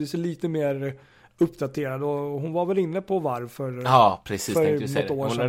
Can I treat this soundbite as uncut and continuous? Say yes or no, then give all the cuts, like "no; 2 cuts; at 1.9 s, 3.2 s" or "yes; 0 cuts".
yes; 0 cuts